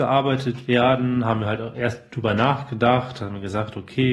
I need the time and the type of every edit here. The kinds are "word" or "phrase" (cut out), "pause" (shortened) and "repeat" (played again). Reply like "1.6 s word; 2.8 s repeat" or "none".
none